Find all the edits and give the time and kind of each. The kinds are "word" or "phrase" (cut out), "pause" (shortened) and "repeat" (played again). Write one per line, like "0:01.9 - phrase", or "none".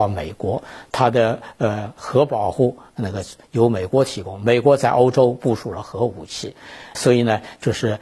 0:06.9 - word